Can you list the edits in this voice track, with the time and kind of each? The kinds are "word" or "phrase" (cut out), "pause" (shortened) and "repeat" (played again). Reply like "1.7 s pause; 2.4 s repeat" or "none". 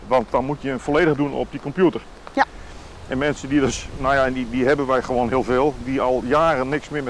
1.2 s word